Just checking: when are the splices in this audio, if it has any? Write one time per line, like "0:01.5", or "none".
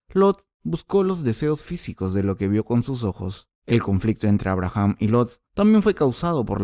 0:03.6
0:05.5